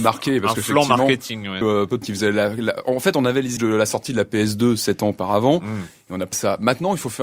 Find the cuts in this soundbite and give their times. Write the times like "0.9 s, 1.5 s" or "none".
1.6 s, 2.0 s, 3.6 s, 6.3 s